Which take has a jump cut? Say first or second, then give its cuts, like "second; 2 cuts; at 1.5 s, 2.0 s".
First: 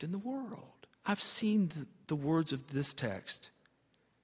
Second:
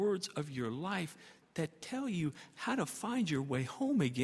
first; 1 cut; at 1.0 s